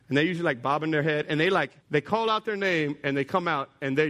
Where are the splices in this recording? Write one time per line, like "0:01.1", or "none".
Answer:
0:01.8

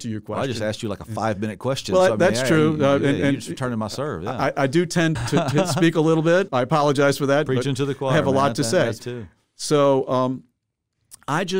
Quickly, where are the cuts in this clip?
0:05.2
0:06.5
0:09.0

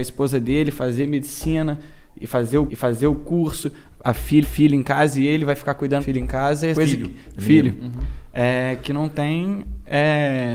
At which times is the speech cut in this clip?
0:02.7
0:04.4
0:06.0
0:06.7

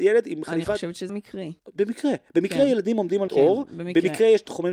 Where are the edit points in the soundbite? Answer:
0:01.1
0:01.6
0:03.3

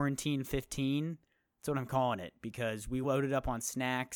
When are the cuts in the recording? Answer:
none

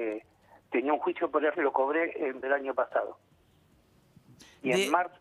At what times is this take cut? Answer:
0:01.5
0:02.4

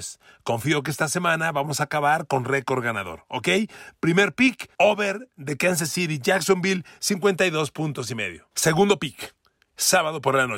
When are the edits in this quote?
0:04.7
0:08.5

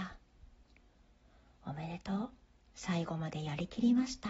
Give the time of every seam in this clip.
none

